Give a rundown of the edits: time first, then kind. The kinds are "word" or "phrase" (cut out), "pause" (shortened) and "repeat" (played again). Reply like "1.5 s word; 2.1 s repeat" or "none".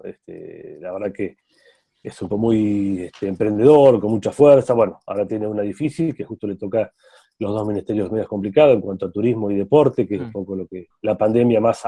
2.3 s word